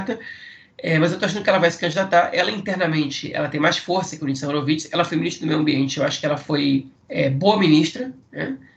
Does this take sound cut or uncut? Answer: uncut